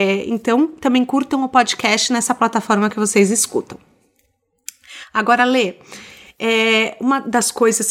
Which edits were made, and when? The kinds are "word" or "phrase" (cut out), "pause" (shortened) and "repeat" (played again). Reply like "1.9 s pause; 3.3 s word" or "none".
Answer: none